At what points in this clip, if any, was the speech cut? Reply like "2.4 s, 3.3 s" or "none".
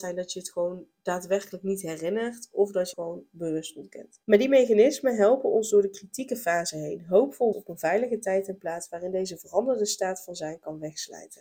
2.9 s, 4.2 s, 7.5 s